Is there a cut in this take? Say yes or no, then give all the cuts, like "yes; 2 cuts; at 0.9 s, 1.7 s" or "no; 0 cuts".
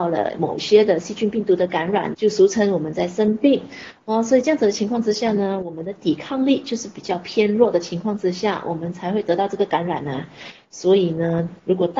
yes; 1 cut; at 2.1 s